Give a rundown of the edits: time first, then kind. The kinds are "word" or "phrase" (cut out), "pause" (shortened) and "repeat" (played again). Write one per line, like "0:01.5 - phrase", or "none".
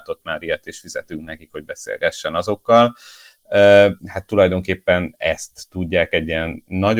0:04.0 - pause